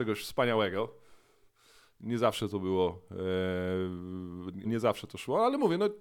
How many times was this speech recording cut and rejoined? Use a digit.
1